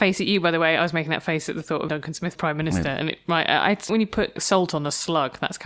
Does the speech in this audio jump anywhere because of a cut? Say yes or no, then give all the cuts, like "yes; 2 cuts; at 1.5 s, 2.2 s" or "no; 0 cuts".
yes; 4 cuts; at 1.9 s, 2.4 s, 3.9 s, 4.4 s